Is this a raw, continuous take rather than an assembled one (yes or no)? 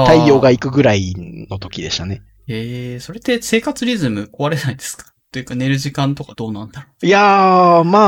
no